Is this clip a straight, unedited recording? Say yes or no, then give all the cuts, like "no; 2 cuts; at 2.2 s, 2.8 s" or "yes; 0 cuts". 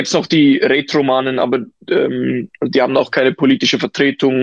yes; 0 cuts